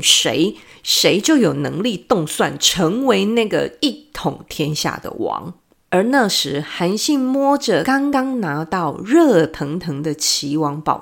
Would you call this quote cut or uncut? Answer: uncut